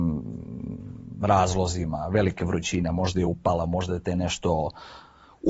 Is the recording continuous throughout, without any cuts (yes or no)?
yes